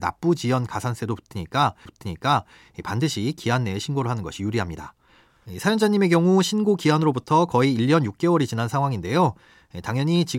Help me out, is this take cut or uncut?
cut